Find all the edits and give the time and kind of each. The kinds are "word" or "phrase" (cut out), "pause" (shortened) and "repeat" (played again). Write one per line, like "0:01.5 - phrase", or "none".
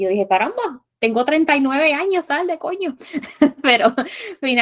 0:00.9 - pause
0:02.3 - phrase